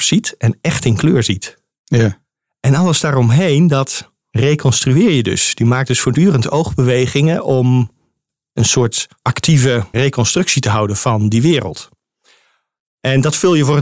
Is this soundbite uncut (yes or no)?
no